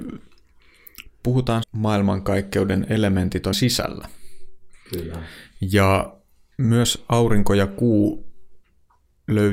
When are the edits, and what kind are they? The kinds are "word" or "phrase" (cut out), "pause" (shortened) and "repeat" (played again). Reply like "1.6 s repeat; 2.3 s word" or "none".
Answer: 1.2 s word; 1.6 s phrase; 3.5 s phrase